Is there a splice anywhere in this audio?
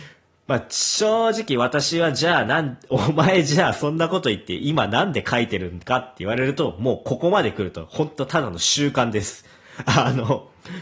no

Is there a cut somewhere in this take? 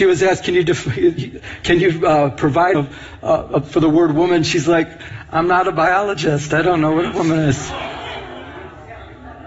yes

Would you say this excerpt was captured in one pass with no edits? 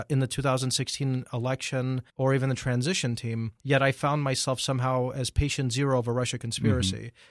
no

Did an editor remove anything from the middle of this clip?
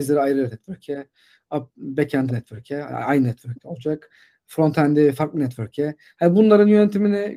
yes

